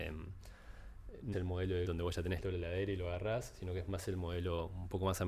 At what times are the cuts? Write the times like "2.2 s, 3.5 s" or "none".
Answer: 1.3 s, 1.9 s, 2.4 s